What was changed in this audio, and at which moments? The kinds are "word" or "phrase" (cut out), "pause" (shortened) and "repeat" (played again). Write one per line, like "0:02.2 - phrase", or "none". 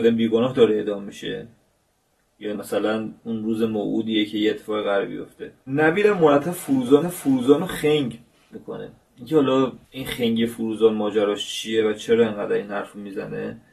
0:02.5 - word
0:07.0 - repeat
0:08.5 - word
0:09.8 - pause